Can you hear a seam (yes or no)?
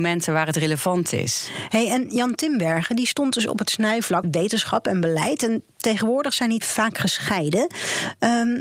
yes